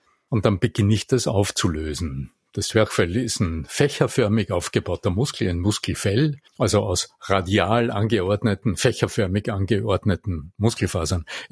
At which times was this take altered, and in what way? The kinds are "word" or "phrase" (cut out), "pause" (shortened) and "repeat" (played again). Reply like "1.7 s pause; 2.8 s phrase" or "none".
6.5 s pause